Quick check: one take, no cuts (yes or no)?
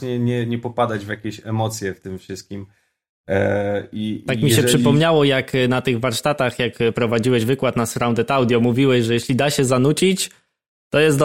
yes